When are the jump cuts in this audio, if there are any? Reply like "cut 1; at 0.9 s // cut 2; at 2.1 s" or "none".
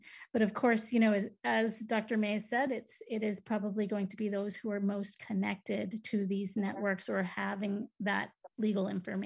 none